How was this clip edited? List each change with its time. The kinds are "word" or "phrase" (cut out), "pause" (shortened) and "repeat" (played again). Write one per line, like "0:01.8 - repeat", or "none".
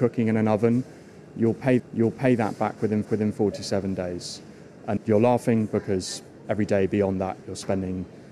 0:01.8 - repeat
0:03.0 - repeat
0:05.0 - word

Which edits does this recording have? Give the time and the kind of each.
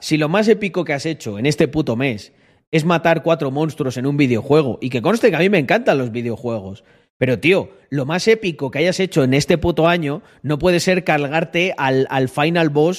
none

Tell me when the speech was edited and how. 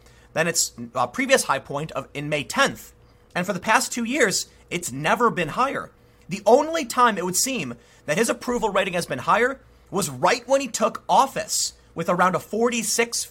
none

